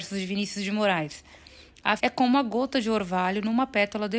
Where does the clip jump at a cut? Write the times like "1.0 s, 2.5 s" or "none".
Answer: 2.0 s